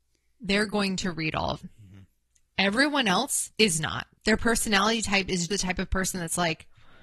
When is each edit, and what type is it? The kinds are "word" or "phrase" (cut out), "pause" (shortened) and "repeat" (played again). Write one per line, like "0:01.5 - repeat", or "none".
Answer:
0:01.6 - word
0:03.5 - pause
0:04.1 - pause
0:05.5 - word